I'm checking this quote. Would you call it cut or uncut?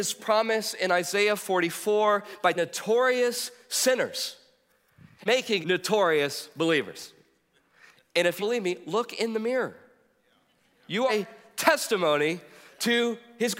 cut